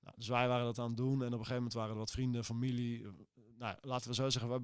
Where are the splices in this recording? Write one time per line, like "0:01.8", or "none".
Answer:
none